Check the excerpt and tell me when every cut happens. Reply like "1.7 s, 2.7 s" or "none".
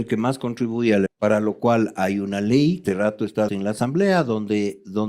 1.1 s, 2.9 s, 3.5 s